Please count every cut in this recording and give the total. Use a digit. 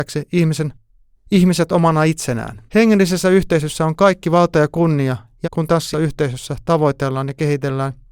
3